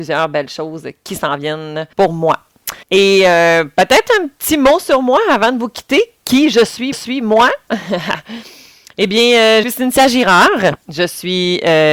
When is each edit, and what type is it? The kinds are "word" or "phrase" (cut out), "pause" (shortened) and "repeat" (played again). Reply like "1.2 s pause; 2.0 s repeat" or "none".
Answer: 1.9 s pause; 2.8 s pause; 6.9 s repeat; 9.6 s phrase